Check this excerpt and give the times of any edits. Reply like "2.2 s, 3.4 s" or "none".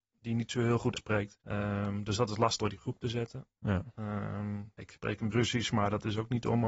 1.0 s, 1.4 s, 2.6 s, 4.8 s, 5.3 s

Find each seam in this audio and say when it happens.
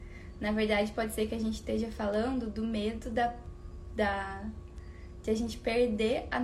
none

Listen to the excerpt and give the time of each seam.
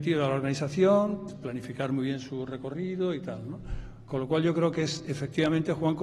1.3 s

